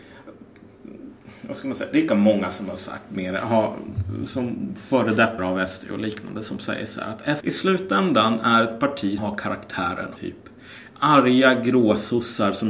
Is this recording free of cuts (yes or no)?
no